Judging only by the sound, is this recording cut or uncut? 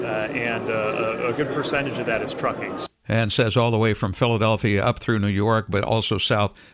uncut